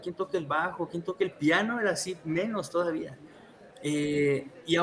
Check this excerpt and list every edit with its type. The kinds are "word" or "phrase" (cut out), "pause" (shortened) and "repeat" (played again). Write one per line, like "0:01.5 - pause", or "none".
none